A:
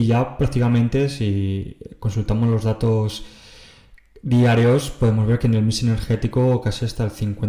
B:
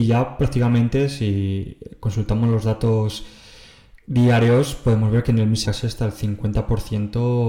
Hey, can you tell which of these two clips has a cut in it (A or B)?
B